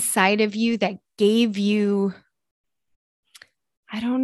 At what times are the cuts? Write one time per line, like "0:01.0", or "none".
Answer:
none